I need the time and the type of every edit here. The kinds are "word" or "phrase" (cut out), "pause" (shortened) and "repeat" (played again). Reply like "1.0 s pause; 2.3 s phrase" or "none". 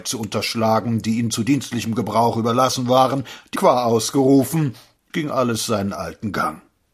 3.6 s word; 5.1 s phrase